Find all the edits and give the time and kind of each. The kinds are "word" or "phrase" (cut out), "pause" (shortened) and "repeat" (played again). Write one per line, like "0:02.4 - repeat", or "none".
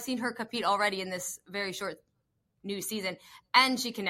none